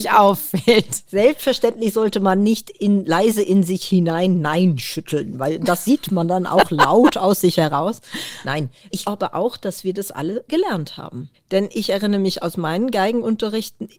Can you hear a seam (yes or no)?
yes